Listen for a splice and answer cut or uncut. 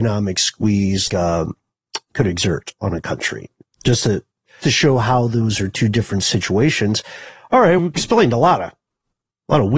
cut